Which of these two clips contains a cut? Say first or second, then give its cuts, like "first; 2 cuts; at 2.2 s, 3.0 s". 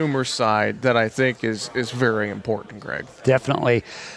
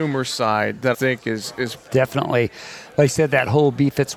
second; 2 cuts; at 0.9 s, 1.7 s